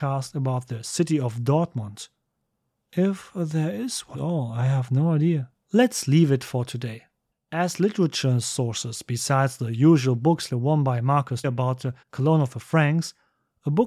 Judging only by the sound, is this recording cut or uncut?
cut